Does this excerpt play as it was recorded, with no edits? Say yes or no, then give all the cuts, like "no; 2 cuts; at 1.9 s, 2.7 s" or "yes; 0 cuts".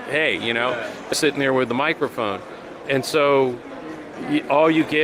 no; 1 cut; at 1.1 s